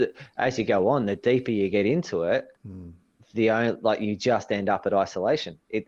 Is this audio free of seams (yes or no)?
no